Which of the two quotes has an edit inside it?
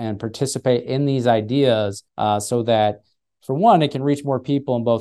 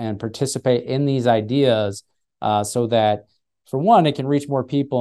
first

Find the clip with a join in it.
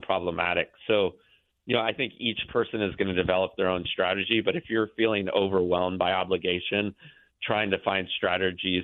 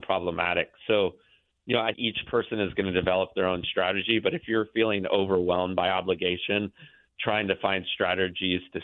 second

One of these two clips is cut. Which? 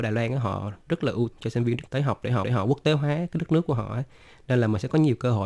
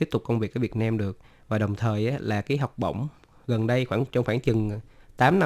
first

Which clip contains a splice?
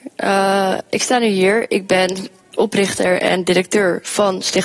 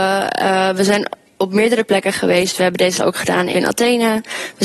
second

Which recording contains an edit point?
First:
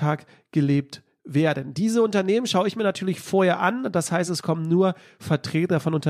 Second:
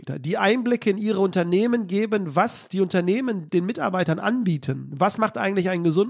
second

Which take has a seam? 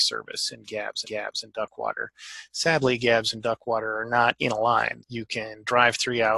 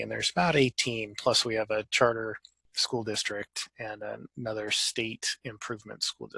first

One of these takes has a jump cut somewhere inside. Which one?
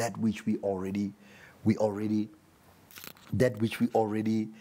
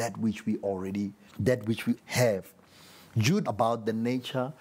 second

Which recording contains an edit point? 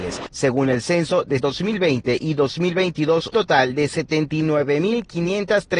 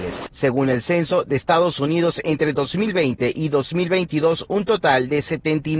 first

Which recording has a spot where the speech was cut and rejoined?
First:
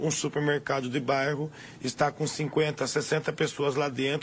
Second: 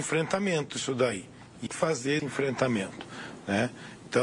second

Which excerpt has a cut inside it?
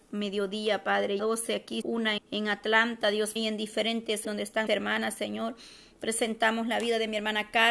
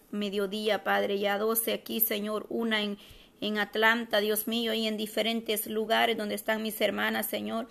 first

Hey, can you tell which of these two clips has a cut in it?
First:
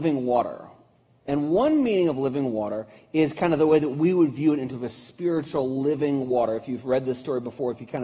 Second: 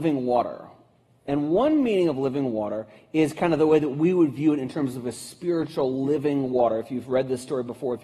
first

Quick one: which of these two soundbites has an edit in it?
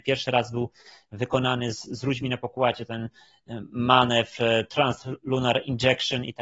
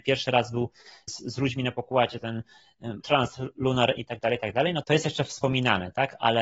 second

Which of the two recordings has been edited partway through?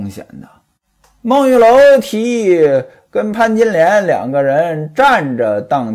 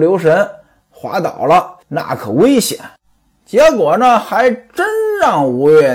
second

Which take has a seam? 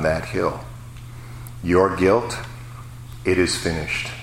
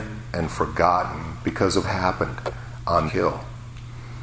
second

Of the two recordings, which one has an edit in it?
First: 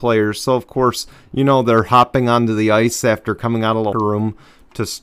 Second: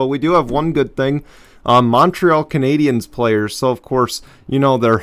first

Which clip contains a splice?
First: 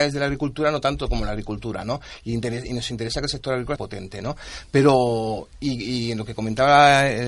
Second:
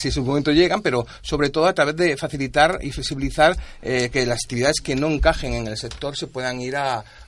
first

